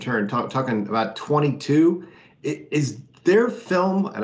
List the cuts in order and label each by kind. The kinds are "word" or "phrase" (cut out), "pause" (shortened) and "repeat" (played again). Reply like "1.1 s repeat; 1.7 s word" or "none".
none